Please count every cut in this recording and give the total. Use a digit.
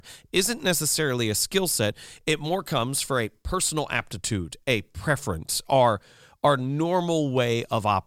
0